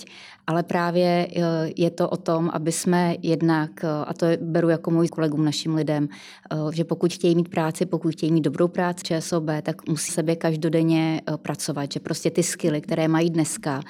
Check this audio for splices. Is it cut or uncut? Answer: cut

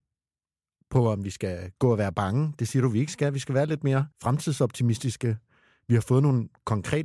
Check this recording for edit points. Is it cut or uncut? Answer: cut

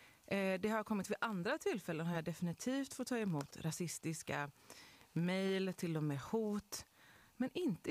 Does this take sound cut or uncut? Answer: uncut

